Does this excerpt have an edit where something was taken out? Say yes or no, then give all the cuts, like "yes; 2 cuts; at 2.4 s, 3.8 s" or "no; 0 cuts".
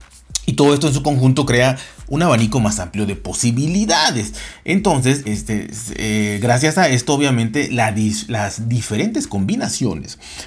yes; 1 cut; at 5.2 s